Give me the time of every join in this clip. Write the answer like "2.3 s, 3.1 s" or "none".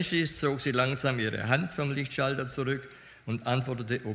none